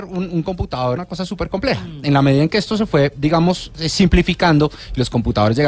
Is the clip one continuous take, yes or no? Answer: no